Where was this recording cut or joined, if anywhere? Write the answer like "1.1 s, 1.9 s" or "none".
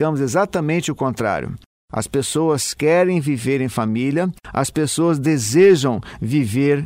none

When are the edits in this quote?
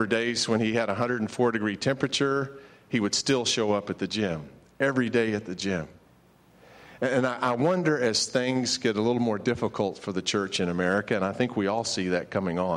none

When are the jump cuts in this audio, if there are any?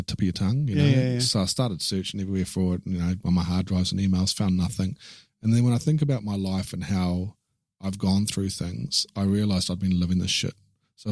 none

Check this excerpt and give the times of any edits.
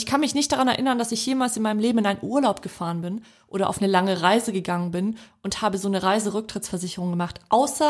none

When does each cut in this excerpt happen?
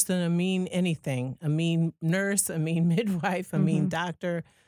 none

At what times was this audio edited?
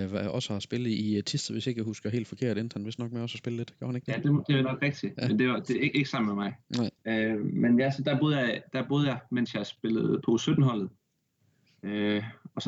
7.0 s

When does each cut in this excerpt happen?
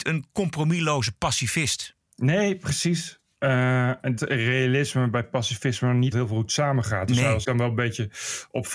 2.0 s, 4.2 s, 6.1 s, 7.4 s

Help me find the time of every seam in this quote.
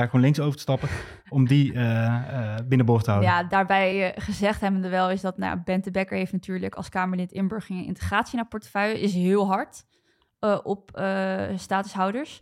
none

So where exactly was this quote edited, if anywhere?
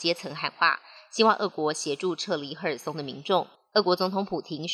3.5 s

